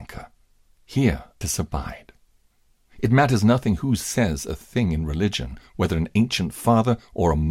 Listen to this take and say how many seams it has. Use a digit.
1